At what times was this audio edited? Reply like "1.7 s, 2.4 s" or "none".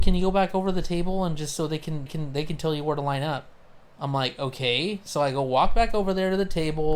2.1 s, 3.8 s